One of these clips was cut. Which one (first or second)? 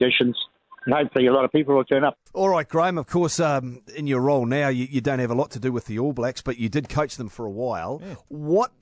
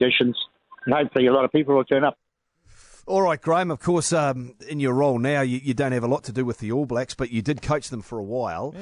first